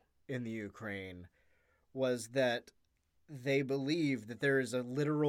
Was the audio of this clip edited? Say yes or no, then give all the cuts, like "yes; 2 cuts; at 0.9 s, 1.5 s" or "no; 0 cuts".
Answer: no; 0 cuts